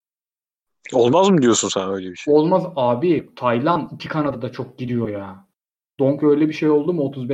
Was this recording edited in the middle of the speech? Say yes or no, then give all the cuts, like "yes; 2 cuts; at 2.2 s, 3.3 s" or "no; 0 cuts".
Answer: no; 0 cuts